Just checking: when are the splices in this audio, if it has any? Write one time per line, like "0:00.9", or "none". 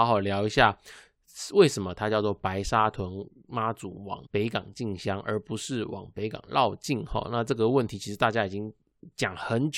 0:04.3